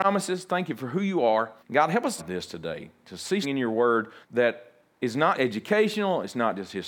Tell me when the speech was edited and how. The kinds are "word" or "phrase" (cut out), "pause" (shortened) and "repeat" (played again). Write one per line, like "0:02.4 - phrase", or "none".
0:01.6 - pause
0:02.2 - phrase
0:03.4 - word
0:04.2 - pause
0:05.4 - word